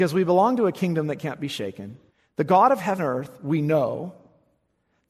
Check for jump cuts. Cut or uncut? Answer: cut